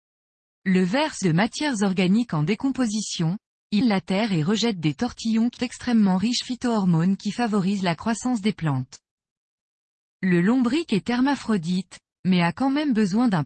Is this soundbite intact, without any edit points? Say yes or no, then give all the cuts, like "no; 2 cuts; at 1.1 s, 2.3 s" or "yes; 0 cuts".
no; 4 cuts; at 1.2 s, 3.8 s, 5.6 s, 6.4 s